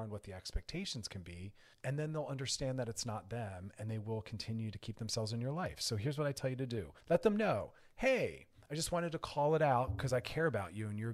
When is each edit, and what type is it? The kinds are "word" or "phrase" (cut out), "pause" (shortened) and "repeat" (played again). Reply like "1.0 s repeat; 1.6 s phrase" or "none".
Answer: 1.7 s pause; 7.0 s pause